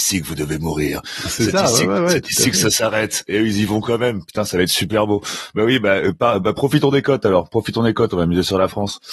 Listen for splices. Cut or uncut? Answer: uncut